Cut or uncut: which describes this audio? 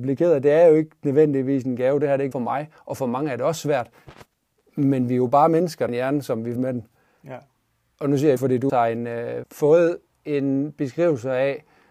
cut